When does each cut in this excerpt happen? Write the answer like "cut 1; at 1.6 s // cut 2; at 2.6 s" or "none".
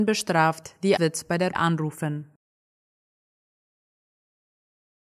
cut 1; at 1.0 s // cut 2; at 1.5 s

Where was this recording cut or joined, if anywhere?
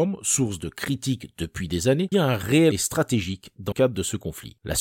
cut 1; at 2.1 s // cut 2; at 2.7 s // cut 3; at 3.7 s

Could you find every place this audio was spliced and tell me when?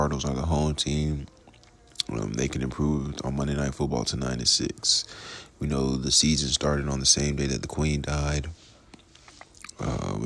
none

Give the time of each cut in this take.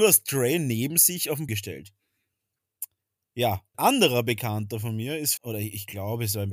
cut 1; at 1.5 s // cut 2; at 3.7 s // cut 3; at 5.4 s

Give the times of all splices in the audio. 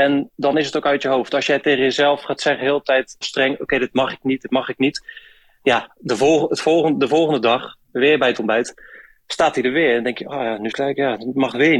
cut 1; at 3.2 s // cut 2; at 10.7 s

